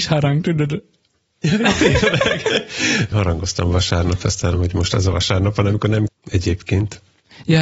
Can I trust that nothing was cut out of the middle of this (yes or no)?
no